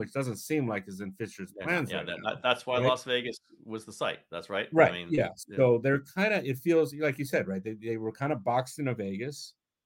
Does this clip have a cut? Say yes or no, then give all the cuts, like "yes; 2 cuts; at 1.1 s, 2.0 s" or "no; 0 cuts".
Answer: no; 0 cuts